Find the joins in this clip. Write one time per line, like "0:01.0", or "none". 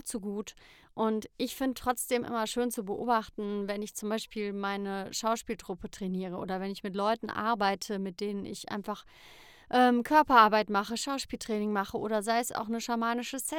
none